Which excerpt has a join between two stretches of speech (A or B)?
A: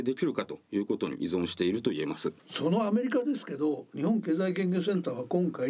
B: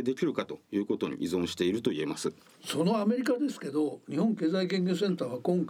A